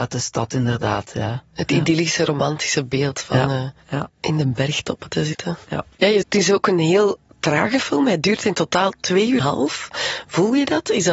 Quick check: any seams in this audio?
yes; 3 cuts; at 4.1 s, 6.2 s, 9.4 s

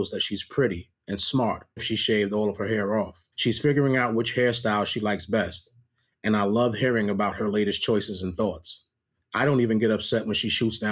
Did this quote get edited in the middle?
yes; 3 cuts; at 1.0 s, 1.8 s, 3.3 s

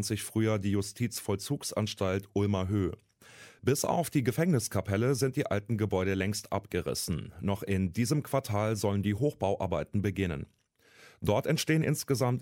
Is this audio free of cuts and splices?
yes; 0 cuts

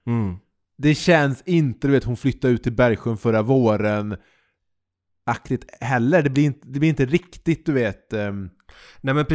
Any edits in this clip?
no; 0 cuts

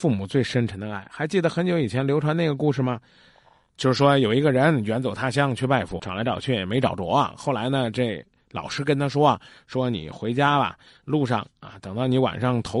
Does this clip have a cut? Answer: yes; 1 cut; at 6.0 s

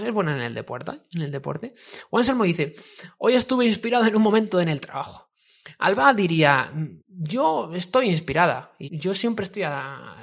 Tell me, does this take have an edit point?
yes; 2 cuts; at 7.0 s, 8.8 s

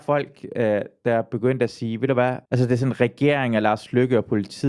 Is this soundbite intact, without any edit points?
no; 1 cut; at 2.5 s

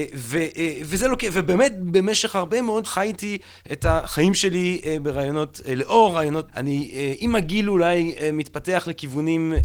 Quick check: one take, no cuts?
no; 2 cuts; at 2.8 s, 6.5 s

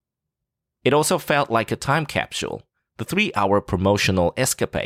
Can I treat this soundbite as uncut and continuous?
no; 1 cut; at 2.8 s

